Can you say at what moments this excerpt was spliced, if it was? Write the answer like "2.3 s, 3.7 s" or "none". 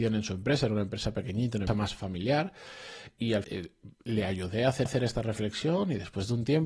1.7 s, 3.4 s, 3.9 s, 4.9 s